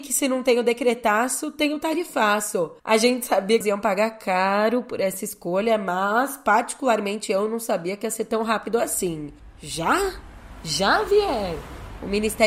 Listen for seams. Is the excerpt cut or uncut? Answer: cut